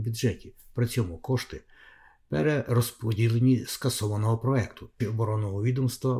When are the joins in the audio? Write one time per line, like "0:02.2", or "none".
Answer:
0:03.6
0:05.0